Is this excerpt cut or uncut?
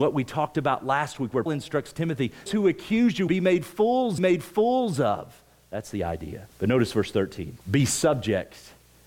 cut